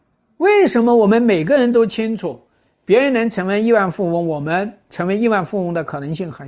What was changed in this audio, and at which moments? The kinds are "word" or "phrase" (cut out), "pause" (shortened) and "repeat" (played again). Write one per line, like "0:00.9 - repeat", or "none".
none